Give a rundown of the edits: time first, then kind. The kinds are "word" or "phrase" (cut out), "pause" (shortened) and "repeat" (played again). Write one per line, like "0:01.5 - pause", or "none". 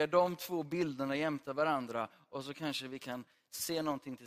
none